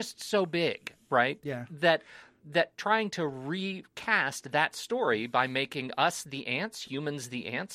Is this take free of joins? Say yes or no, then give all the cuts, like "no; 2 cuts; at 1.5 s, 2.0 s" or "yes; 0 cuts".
yes; 0 cuts